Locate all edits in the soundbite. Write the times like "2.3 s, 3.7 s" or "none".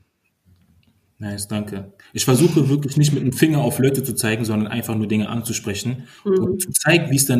6.2 s